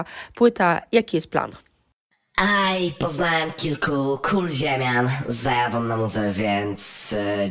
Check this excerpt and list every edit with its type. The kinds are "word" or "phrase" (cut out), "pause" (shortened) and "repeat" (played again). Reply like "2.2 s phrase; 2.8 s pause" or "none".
none